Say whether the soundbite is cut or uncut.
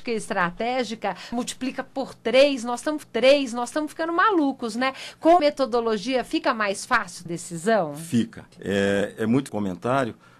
cut